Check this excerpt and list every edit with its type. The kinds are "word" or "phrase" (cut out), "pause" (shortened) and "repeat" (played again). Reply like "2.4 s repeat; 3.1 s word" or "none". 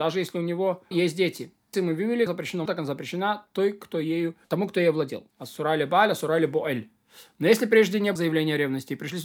0.9 s phrase; 1.7 s phrase; 2.3 s phrase; 2.7 s word; 4.4 s pause; 5.3 s pause; 8.2 s word

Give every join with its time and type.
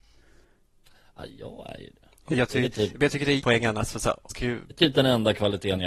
2.3 s word; 3.4 s word; 4.3 s word

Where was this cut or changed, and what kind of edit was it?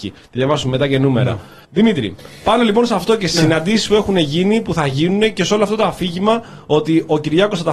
1.6 s pause

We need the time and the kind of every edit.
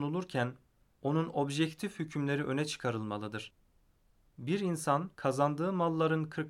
5.1 s pause

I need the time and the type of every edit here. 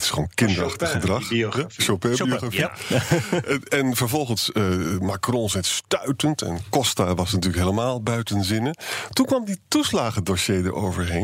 none

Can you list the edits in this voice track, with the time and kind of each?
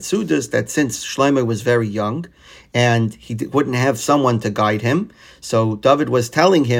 none

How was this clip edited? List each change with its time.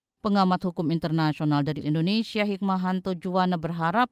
1.8 s word

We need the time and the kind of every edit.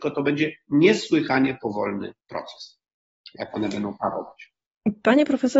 2.2 s pause

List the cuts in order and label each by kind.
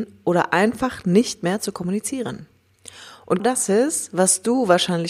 3.4 s word

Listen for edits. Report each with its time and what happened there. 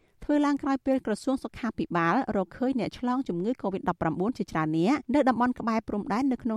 5.0 s pause

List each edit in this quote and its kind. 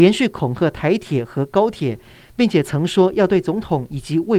none

